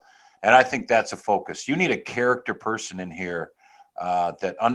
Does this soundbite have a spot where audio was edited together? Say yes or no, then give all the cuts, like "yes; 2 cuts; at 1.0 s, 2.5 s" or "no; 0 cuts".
no; 0 cuts